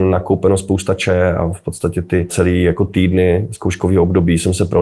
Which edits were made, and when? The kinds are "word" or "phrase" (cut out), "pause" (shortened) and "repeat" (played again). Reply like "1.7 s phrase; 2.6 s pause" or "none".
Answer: 2.3 s word